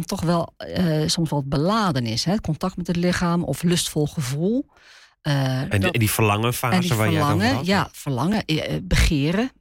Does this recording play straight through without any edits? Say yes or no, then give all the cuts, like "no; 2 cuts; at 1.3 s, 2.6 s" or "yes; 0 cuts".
yes; 0 cuts